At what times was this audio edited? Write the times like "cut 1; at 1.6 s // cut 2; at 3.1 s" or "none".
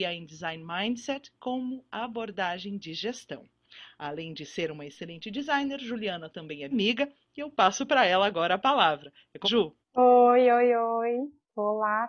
cut 1; at 6.7 s // cut 2; at 9.4 s // cut 3; at 9.8 s